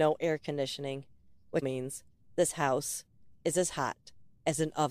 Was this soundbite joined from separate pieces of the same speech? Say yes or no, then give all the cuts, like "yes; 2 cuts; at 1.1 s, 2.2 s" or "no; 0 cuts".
yes; 1 cut; at 1.6 s